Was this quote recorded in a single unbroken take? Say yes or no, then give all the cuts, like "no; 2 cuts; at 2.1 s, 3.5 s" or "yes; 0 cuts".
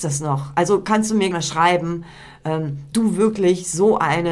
no; 2 cuts; at 1.3 s, 2.9 s